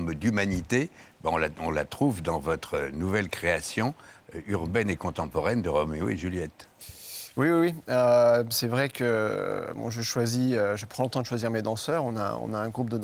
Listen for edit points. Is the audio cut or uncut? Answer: uncut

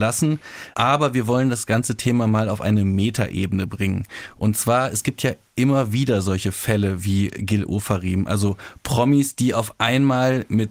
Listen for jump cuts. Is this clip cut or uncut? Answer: uncut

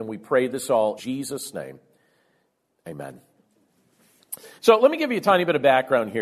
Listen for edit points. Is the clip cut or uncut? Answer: cut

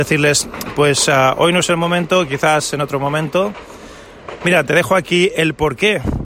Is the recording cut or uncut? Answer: uncut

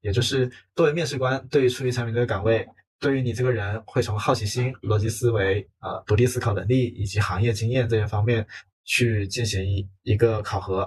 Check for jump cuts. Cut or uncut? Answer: uncut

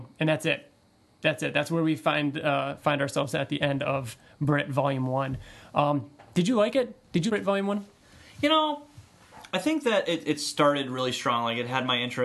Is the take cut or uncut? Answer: cut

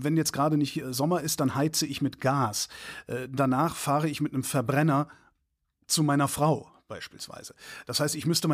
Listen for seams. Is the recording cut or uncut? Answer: uncut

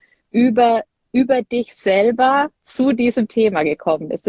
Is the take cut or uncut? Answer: uncut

